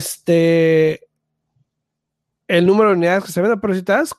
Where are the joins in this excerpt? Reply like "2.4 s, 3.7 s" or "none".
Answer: none